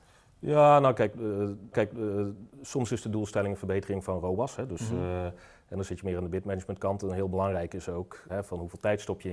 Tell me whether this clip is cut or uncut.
cut